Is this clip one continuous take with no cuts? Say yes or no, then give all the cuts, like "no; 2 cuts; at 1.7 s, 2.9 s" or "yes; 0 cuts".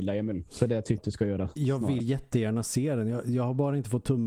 no; 2 cuts; at 1.0 s, 2.0 s